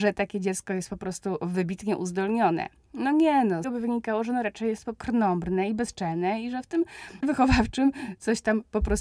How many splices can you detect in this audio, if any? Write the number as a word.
three